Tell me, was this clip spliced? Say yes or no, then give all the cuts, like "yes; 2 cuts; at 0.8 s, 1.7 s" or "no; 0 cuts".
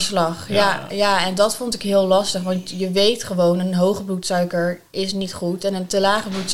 no; 0 cuts